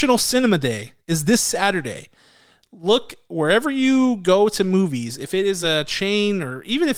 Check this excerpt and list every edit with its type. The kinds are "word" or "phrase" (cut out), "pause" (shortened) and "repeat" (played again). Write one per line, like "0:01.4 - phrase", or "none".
none